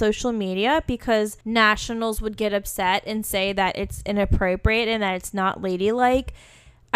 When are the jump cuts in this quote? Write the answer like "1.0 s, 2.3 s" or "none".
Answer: 1.4 s

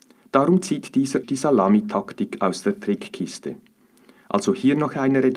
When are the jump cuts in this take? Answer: 1.2 s

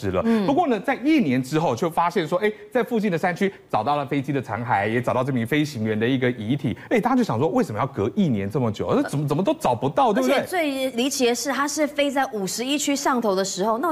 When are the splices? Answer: none

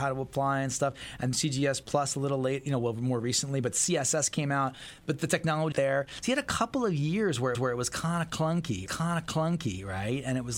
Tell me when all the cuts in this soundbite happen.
1.3 s, 5.7 s, 7.5 s, 8.9 s

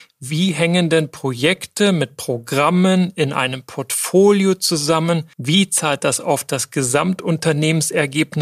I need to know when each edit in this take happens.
5.3 s

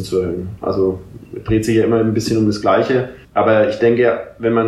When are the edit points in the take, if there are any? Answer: 3.2 s

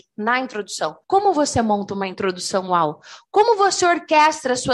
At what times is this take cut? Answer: 1.0 s

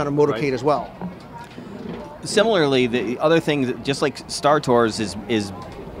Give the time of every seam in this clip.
none

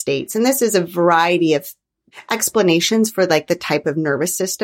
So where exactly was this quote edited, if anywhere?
none

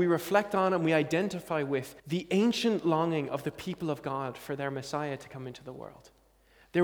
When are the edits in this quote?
2.0 s

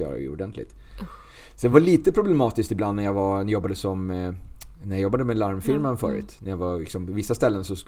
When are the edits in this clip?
none

